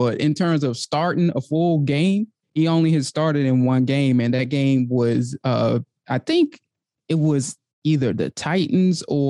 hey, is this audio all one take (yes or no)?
yes